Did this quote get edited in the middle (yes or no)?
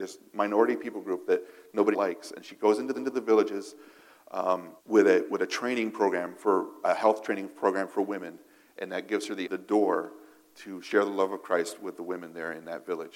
yes